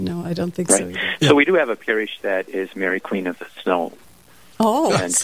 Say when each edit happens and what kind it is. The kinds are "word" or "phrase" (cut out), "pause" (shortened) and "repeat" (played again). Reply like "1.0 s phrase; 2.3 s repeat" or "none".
none